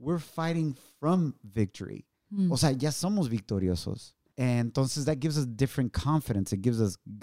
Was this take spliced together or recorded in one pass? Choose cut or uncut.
uncut